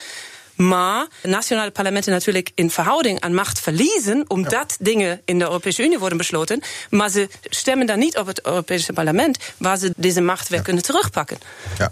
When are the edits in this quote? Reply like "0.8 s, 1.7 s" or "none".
1.2 s, 9.9 s